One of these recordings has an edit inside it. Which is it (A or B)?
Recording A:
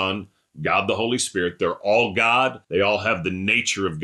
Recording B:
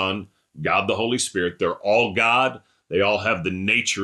A